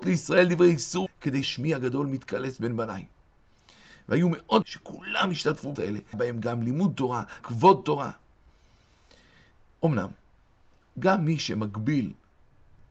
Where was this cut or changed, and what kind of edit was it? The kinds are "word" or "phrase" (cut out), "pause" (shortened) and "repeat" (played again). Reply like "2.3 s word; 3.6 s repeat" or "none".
1.1 s word; 1.4 s word; 4.6 s word; 5.7 s word; 6.1 s word; 7.4 s word